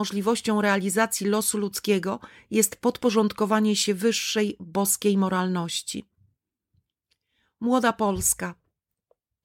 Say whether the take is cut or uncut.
uncut